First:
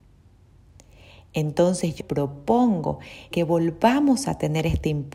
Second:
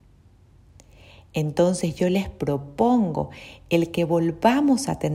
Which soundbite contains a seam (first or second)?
first